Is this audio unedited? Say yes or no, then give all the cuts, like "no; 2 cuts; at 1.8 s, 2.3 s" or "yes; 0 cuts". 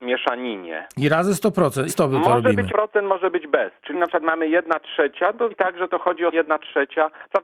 no; 5 cuts; at 1.9 s, 2.7 s, 3.9 s, 5.5 s, 6.3 s